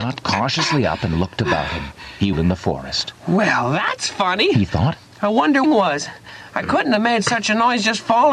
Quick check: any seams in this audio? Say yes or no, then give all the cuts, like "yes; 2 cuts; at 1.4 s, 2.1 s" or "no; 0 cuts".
yes; 2 cuts; at 2.3 s, 5.6 s